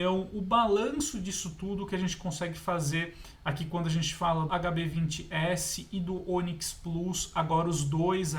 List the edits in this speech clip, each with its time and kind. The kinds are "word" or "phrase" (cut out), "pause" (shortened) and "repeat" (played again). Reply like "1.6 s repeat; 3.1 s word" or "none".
4.5 s word